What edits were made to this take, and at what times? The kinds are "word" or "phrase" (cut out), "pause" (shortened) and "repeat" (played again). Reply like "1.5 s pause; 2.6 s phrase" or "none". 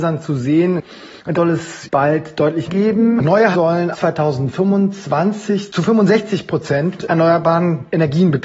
1.3 s word; 1.8 s word; 2.7 s word; 3.5 s word; 3.9 s word; 7.0 s word